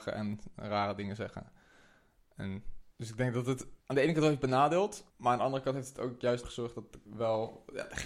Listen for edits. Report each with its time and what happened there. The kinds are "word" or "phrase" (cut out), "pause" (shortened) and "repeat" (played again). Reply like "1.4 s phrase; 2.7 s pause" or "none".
2.9 s pause; 3.8 s pause; 5.1 s pause; 6.4 s word; 7.1 s pause